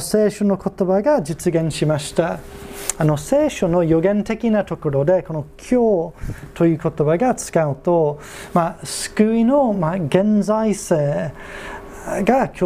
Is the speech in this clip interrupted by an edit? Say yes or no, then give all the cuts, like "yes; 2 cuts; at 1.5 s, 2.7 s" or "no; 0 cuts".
no; 0 cuts